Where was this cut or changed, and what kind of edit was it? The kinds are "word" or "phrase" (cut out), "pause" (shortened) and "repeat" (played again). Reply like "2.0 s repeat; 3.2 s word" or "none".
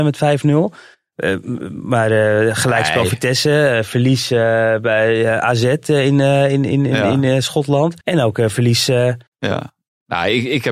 8.0 s pause; 9.3 s pause